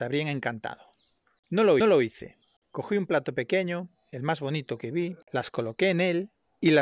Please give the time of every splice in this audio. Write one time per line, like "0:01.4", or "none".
0:01.8
0:05.2